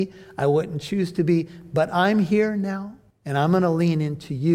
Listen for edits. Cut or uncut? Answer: cut